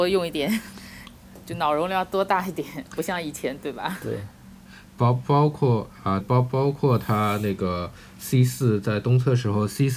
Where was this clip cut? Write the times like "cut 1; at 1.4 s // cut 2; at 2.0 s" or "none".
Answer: cut 1; at 6.2 s